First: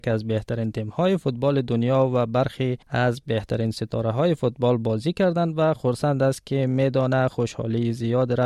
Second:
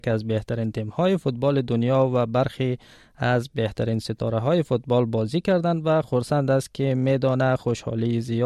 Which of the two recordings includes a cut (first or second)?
first